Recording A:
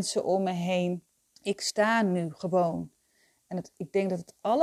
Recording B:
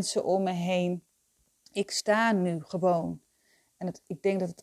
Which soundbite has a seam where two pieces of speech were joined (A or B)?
A